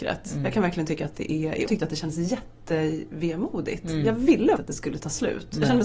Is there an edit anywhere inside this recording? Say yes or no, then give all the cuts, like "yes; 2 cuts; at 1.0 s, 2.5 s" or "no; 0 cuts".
yes; 2 cuts; at 1.7 s, 4.6 s